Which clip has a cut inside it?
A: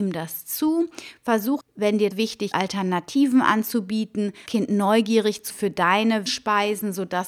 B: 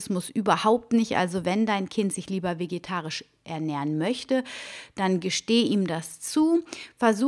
A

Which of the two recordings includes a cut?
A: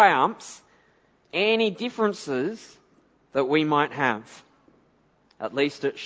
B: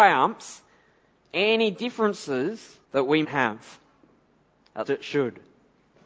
B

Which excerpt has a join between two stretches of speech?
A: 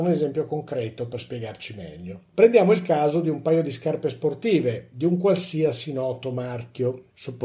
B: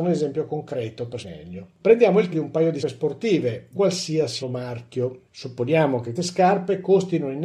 B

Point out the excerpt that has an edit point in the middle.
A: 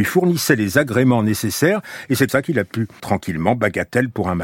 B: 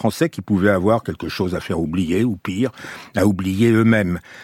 A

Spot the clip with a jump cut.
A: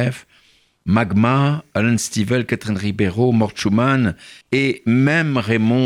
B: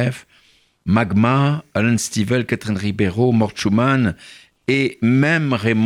A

